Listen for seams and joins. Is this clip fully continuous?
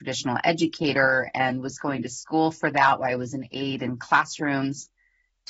yes; 0 cuts

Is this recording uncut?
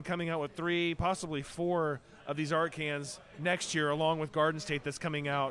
yes; 0 cuts

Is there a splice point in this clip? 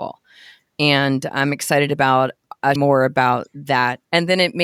yes; 1 cut; at 2.8 s

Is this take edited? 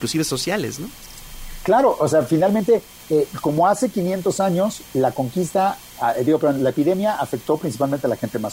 no; 0 cuts

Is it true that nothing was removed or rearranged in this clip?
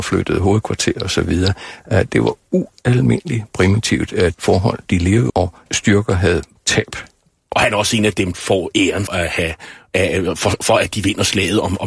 no; 6 cuts; at 4.3 s, 5.3 s, 5.7 s, 6.6 s, 8.3 s, 9.1 s

